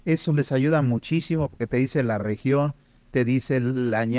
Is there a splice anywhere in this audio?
no; 0 cuts

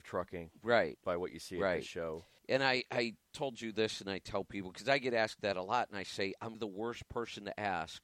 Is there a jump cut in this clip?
yes; 2 cuts; at 2.4 s, 6.5 s

